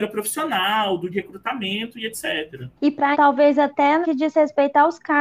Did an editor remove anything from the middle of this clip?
yes; 4 cuts; at 1.1 s, 2.8 s, 3.1 s, 4.0 s

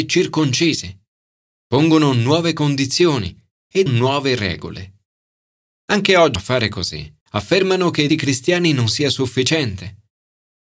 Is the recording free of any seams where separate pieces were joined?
no; 4 cuts; at 3.9 s, 6.4 s, 7.2 s, 8.1 s

